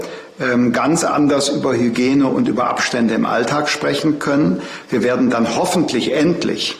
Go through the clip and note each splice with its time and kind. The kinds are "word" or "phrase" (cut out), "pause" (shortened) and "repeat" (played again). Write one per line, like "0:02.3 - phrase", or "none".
none

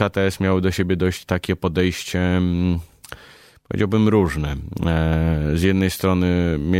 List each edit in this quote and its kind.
none

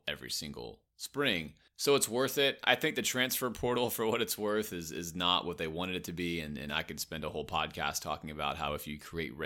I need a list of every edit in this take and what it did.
0:01.7 - pause

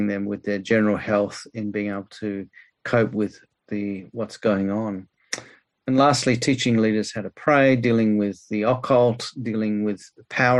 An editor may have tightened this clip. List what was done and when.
none

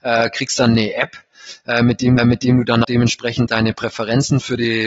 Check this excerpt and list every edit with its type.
0:02.2 - repeat
0:02.8 - word

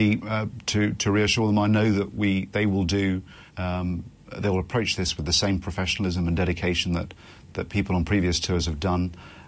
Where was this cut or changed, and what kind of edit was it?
0:03.5 - pause

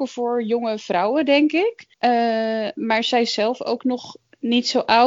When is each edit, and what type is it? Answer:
0:01.9 - pause

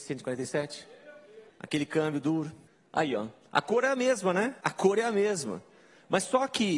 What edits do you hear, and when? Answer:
0:01.5 - pause
0:02.7 - pause
0:04.6 - pause

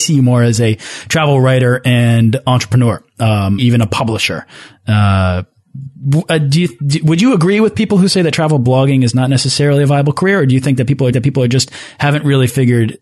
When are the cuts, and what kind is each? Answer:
0:03.6 - word
0:11.1 - repeat

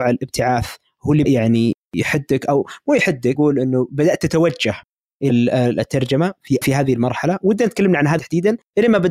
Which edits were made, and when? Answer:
0:01.2 - word
0:03.3 - word
0:05.3 - word
0:06.6 - word
0:08.2 - word

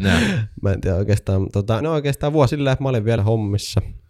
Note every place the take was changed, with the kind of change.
0:01.8 - word
0:02.5 - word
0:03.2 - phrase

